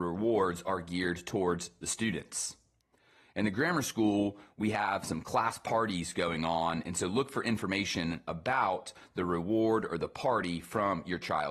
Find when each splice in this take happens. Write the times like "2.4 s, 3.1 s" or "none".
none